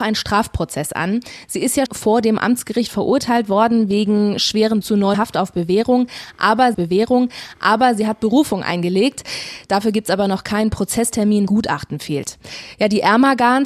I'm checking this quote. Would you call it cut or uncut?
cut